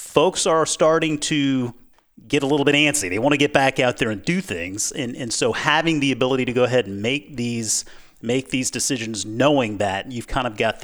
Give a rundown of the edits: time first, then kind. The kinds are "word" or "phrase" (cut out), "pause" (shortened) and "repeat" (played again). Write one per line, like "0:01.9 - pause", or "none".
0:01.9 - pause

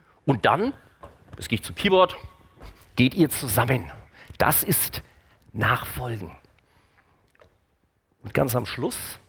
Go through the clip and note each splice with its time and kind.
none

